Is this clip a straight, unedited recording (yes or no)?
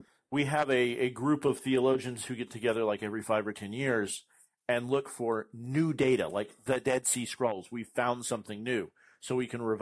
yes